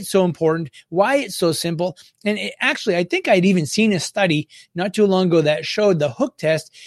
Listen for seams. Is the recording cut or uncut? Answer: uncut